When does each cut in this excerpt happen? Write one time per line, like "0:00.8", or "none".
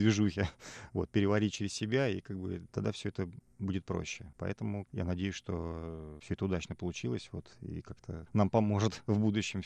0:04.8
0:07.5